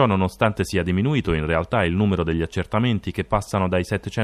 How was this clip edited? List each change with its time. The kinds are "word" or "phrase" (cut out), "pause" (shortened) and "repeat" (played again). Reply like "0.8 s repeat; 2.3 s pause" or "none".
none